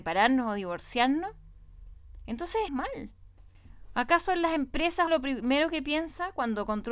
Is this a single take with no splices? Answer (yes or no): no